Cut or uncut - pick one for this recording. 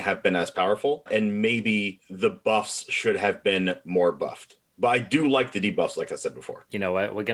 uncut